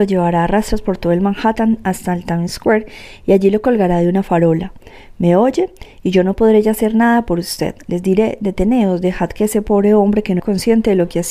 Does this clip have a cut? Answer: yes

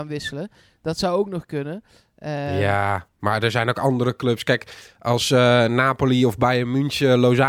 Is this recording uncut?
no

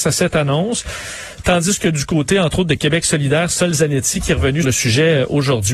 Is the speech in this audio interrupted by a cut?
yes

